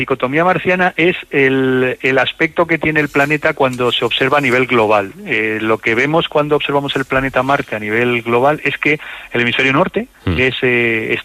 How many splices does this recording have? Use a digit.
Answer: 1